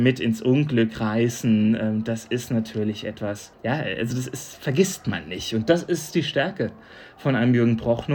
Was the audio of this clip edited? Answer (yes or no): no